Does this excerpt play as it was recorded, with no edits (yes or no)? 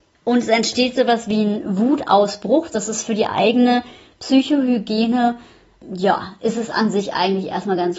yes